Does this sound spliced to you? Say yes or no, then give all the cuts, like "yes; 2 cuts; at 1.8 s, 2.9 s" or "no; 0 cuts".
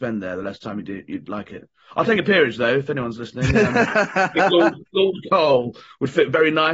no; 0 cuts